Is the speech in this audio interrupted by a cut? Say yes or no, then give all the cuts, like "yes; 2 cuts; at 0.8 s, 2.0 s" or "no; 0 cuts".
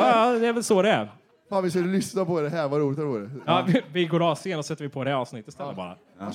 no; 0 cuts